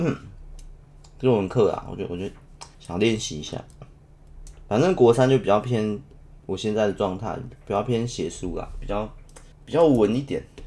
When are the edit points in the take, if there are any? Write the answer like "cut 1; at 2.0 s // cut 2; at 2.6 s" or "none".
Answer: cut 1; at 2.7 s // cut 2; at 6.4 s // cut 3; at 9.5 s